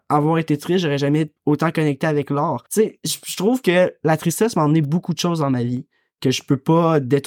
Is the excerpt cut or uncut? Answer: cut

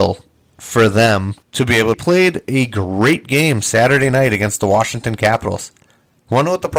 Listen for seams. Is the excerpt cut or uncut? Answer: cut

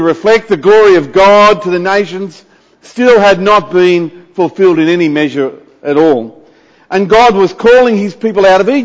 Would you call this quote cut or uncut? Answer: uncut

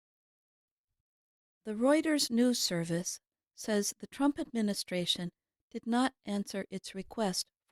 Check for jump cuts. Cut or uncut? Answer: uncut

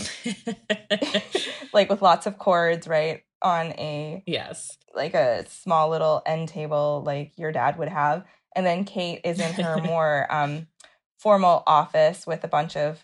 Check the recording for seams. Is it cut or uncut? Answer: cut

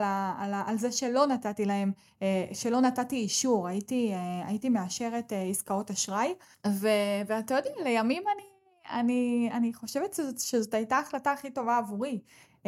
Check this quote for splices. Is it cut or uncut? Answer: uncut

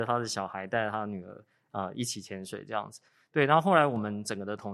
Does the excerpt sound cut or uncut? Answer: uncut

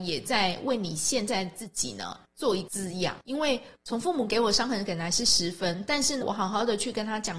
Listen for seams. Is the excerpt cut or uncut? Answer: cut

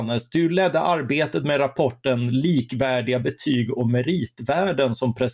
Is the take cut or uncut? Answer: uncut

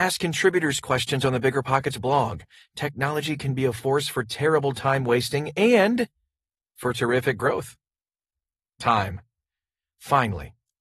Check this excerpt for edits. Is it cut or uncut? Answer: uncut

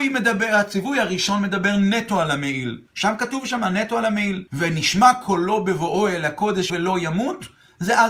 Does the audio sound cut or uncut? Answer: cut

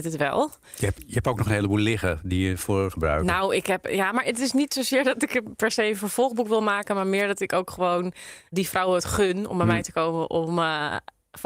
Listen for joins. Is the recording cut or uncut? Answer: cut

